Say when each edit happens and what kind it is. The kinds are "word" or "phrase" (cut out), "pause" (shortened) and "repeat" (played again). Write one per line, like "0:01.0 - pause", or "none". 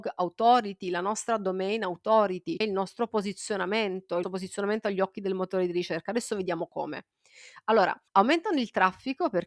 0:02.6 - word
0:04.2 - word
0:08.1 - pause